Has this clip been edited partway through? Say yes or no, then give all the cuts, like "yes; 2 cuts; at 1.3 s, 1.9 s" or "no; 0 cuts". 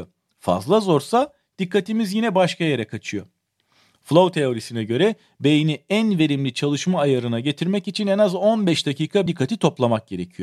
yes; 1 cut; at 9.3 s